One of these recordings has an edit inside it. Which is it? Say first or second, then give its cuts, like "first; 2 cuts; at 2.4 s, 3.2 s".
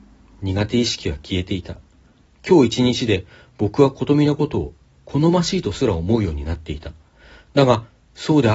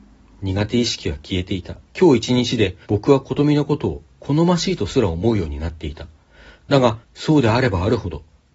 second; 4 cuts; at 1.9 s, 2.8 s, 4.1 s, 7.0 s